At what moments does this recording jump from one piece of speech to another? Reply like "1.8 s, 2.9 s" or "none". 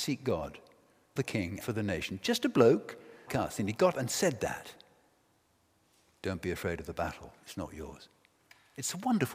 1.2 s, 1.6 s, 3.3 s, 3.9 s